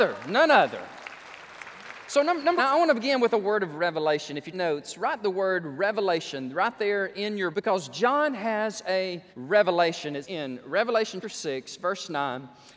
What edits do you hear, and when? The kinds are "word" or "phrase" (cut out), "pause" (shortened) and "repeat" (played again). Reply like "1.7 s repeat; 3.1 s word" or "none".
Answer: 2.6 s word; 4.5 s word; 7.5 s word; 9.3 s pause; 10.2 s word; 11.2 s word